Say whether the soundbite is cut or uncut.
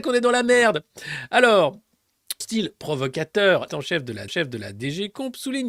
cut